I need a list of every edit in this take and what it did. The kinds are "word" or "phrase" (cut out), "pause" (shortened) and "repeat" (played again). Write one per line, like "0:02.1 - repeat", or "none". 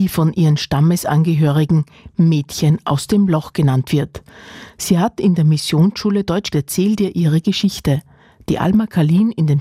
0:06.5 - phrase